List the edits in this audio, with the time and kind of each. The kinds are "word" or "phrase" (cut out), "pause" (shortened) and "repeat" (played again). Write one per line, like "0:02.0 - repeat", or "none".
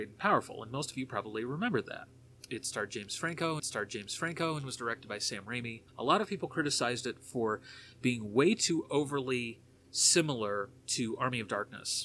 0:03.6 - repeat
0:05.9 - pause
0:10.8 - pause